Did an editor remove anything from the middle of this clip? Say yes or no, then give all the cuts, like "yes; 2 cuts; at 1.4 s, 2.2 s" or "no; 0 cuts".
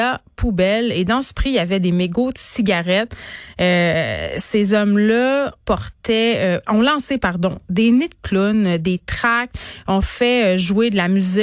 yes; 1 cut; at 5.6 s